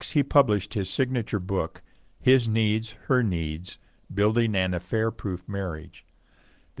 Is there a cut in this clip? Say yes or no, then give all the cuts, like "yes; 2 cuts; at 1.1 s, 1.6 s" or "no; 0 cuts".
no; 0 cuts